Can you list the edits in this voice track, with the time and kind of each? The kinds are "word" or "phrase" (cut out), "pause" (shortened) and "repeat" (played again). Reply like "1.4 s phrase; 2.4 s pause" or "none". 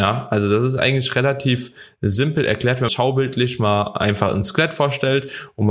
2.9 s phrase